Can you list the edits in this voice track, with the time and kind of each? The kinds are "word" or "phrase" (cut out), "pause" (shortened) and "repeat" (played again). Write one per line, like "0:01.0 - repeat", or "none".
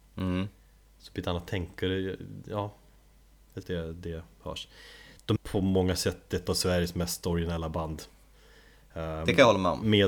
0:03.6 - word
0:05.4 - phrase